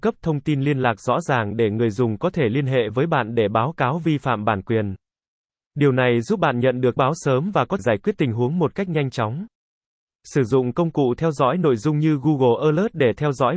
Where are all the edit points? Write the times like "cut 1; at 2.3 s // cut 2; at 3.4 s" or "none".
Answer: cut 1; at 7.0 s // cut 2; at 7.8 s